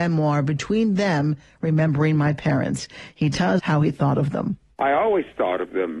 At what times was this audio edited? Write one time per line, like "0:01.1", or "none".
0:03.6